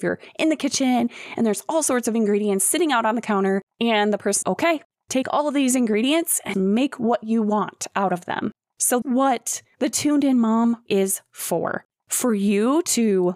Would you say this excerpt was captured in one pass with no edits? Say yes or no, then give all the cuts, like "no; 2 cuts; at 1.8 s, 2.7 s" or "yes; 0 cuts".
no; 4 cuts; at 4.4 s, 6.5 s, 9.0 s, 10.9 s